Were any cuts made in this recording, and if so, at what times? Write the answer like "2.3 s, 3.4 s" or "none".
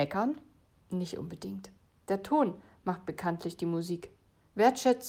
none

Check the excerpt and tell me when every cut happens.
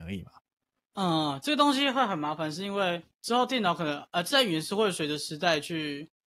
3.1 s

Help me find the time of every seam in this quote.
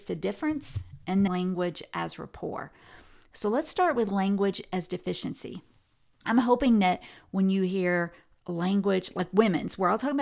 1.3 s

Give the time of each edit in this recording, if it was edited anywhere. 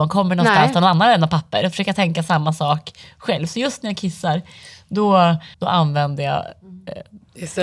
5.5 s

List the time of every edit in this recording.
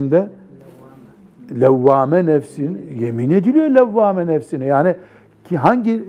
none

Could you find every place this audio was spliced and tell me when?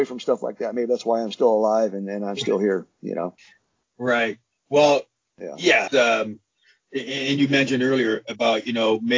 5.9 s

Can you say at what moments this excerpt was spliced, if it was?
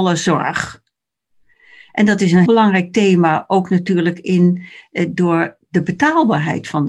2.5 s

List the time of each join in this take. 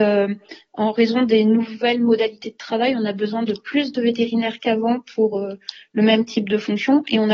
none

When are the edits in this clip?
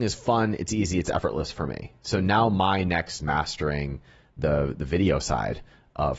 3.2 s

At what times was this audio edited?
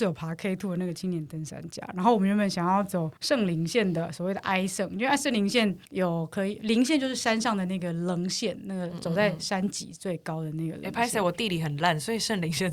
3.2 s, 5.9 s

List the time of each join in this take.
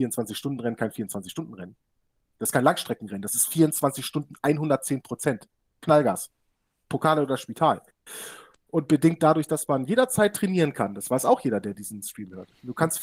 none

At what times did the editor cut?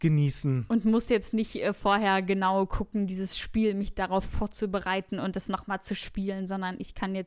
none

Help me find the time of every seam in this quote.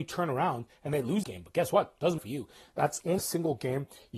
1.2 s, 2.2 s, 3.2 s

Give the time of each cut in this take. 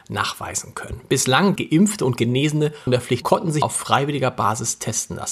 1.6 s, 2.9 s, 3.2 s, 3.6 s

